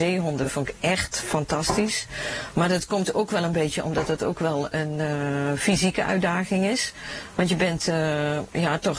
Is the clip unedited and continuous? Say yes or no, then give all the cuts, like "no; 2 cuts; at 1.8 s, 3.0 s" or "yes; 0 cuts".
yes; 0 cuts